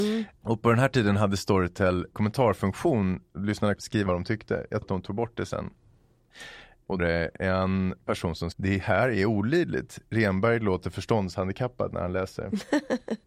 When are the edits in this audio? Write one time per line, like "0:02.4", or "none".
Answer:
0:03.8
0:04.1
0:04.8
0:07.0
0:08.5